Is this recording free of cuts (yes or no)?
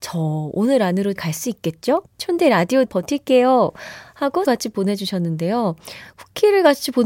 no